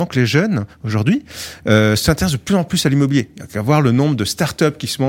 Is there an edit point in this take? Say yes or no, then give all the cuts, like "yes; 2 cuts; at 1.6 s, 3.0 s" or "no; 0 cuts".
no; 0 cuts